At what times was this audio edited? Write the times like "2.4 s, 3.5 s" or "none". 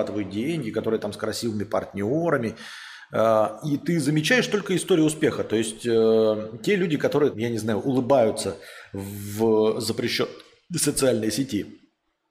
7.3 s